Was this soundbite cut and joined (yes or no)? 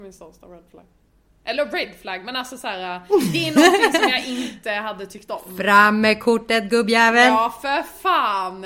no